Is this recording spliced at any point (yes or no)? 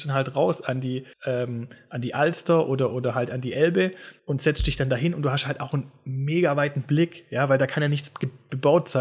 yes